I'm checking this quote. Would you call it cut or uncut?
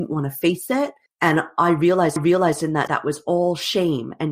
cut